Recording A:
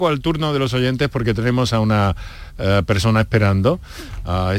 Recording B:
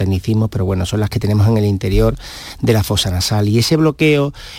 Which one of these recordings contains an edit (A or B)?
B